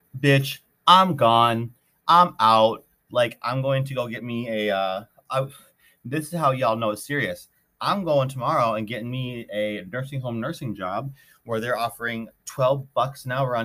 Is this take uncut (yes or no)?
yes